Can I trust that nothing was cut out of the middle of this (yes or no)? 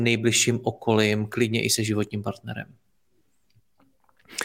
yes